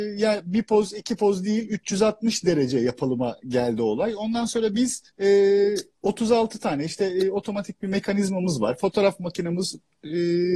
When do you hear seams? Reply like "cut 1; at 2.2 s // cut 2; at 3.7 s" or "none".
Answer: cut 1; at 5.1 s

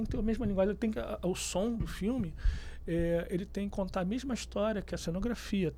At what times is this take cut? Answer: cut 1; at 3.7 s

